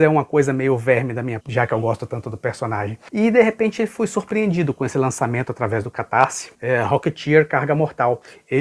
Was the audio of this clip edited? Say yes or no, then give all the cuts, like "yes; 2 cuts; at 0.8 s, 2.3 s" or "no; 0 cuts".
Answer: yes; 1 cut; at 1.4 s